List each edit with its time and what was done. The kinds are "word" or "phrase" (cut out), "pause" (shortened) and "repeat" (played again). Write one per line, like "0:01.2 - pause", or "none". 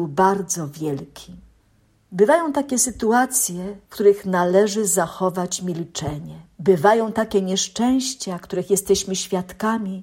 0:01.6 - pause
0:03.8 - pause
0:06.5 - pause